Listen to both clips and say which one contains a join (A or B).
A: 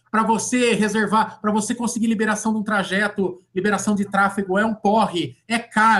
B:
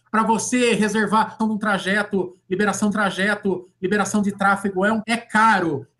B